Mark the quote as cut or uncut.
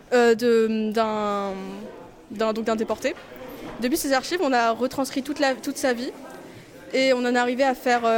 uncut